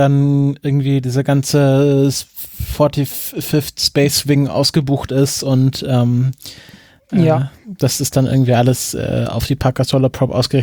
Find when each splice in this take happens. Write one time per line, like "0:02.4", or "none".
none